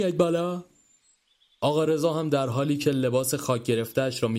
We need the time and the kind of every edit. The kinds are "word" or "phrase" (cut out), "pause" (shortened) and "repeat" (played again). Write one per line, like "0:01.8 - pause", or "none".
none